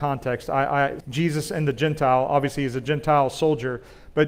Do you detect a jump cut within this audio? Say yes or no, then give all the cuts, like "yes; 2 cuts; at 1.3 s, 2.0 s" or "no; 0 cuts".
yes; 1 cut; at 1.0 s